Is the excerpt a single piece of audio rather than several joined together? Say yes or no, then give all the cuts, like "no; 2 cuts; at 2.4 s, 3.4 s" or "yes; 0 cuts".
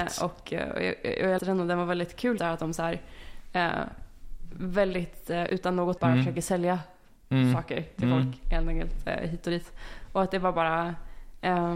no; 4 cuts; at 1.4 s, 2.4 s, 5.5 s, 6.0 s